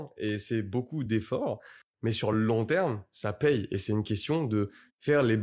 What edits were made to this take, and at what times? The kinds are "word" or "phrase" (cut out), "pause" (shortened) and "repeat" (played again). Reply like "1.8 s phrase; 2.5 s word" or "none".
none